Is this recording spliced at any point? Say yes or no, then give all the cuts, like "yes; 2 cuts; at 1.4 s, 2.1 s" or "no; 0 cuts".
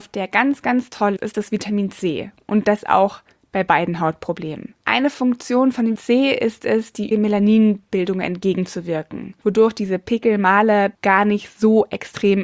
yes; 3 cuts; at 1.2 s, 5.9 s, 7.1 s